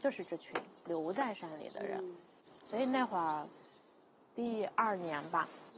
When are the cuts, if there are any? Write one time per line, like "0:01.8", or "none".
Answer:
none